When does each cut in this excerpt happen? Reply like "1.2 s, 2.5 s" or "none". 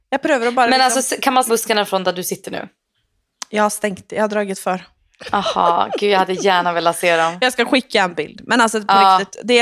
1.5 s